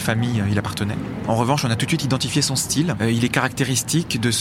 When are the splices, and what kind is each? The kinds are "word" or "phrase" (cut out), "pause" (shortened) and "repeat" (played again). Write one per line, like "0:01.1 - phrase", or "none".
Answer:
none